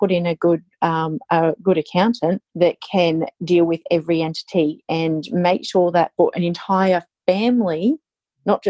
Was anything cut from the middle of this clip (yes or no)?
yes